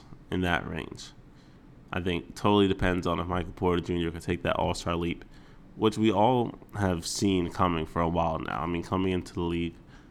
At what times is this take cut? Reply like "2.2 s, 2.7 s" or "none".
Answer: none

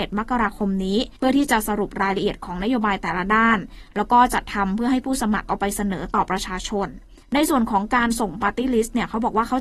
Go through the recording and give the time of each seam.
1.2 s, 7.2 s

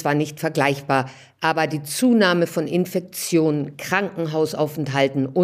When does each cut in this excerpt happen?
none

